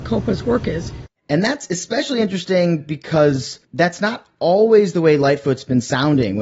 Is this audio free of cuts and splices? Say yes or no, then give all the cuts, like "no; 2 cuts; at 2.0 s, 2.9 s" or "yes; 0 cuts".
no; 1 cut; at 3.6 s